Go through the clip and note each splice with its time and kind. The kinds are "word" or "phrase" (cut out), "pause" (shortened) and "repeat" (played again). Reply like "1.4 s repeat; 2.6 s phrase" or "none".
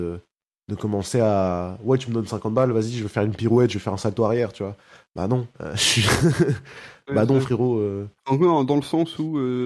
5.5 s pause